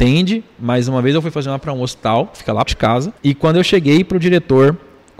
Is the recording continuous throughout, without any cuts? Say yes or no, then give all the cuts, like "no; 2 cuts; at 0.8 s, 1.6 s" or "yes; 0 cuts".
no; 3 cuts; at 1.6 s, 2.7 s, 3.2 s